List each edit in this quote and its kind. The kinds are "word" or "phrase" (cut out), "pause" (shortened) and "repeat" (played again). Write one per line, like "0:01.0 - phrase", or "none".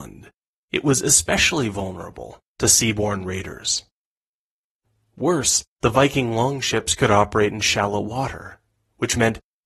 0:05.7 - pause

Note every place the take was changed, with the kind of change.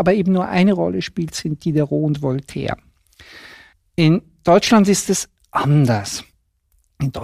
none

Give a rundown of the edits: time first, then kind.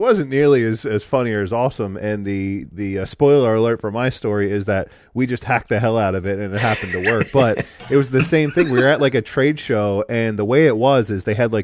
0:02.7 - word

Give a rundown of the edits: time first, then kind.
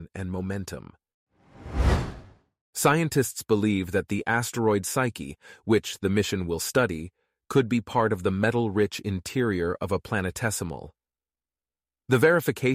none

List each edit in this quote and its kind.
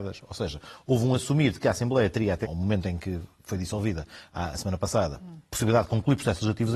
0:02.4 - word

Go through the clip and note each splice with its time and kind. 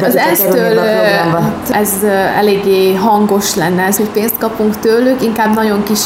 0:01.6 - word
0:04.0 - phrase

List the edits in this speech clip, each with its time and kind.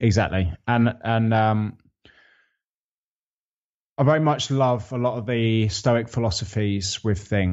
none

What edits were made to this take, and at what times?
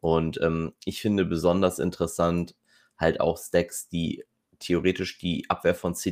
none

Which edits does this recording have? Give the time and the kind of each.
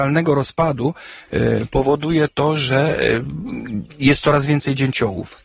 none

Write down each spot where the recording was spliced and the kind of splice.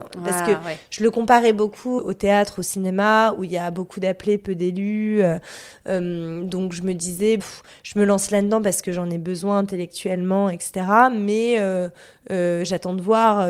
0:02.0 - word
0:07.4 - phrase

